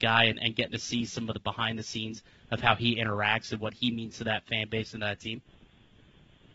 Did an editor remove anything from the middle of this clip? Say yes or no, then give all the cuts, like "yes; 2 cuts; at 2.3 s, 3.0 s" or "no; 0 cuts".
no; 0 cuts